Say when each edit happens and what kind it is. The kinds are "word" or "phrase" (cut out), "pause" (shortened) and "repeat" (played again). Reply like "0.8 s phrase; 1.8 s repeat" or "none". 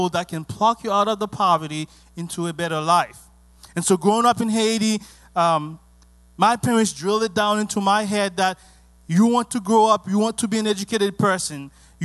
none